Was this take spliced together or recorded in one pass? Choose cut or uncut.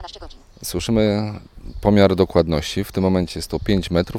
uncut